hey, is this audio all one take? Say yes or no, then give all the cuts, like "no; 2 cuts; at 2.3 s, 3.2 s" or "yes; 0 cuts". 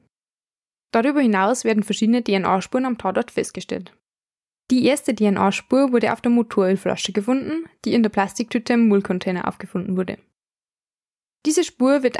yes; 0 cuts